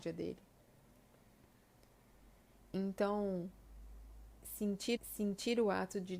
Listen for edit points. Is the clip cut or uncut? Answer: cut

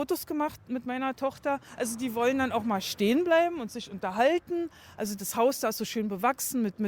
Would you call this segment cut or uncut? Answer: uncut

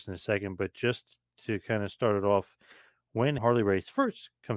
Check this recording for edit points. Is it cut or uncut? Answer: cut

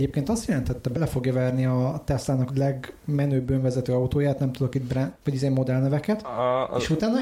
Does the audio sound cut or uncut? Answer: cut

